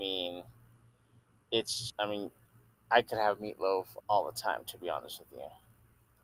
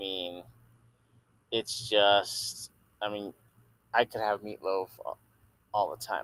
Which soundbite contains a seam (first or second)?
first